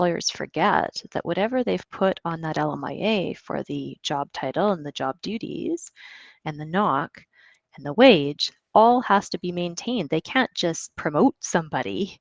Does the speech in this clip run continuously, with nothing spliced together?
yes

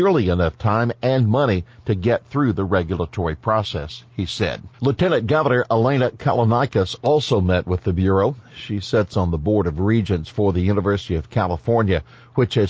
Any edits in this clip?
yes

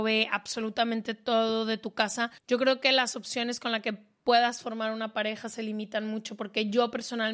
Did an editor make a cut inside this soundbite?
yes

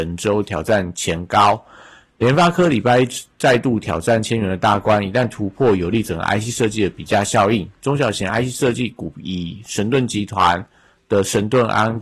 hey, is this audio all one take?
yes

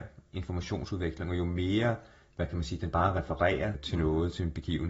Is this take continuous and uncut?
yes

